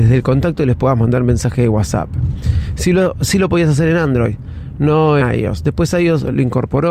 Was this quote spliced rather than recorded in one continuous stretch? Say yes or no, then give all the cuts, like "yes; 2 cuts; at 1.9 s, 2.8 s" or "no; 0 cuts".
yes; 1 cut; at 5.2 s